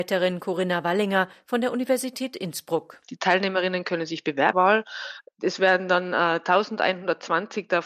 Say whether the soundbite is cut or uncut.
cut